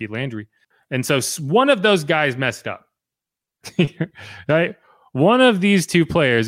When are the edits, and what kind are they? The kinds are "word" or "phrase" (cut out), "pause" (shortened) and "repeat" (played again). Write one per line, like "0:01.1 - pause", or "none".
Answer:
none